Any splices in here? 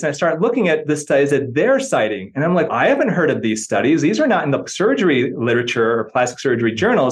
yes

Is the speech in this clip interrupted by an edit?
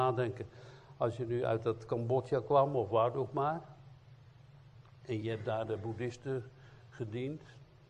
no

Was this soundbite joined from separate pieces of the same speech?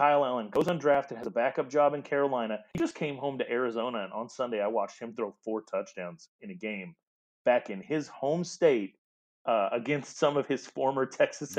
no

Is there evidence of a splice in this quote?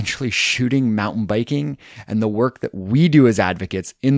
no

